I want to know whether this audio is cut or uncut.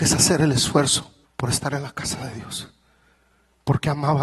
cut